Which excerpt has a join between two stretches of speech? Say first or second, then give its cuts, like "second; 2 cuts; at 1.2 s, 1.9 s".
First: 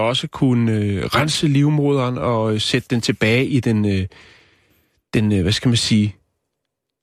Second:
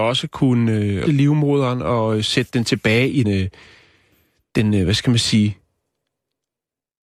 second; 2 cuts; at 1.1 s, 3.2 s